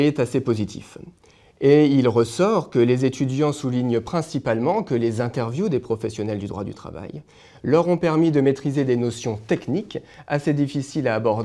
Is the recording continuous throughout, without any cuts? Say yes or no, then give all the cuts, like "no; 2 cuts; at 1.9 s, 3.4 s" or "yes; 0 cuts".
yes; 0 cuts